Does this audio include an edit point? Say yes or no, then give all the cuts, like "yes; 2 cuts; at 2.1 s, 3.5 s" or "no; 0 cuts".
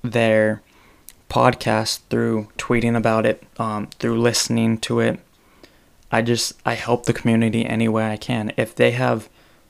yes; 1 cut; at 3.5 s